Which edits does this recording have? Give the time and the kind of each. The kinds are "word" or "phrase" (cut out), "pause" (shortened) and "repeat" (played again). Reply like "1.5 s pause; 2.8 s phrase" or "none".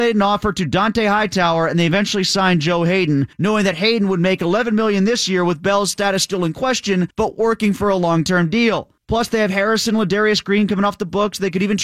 3.3 s pause; 7.1 s pause; 9.0 s pause